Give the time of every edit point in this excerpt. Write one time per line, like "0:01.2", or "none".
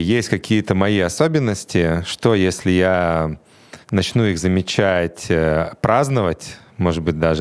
0:03.8